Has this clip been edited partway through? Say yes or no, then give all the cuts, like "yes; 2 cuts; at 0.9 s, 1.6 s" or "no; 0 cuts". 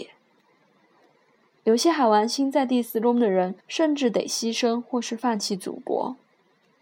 yes; 1 cut; at 3.6 s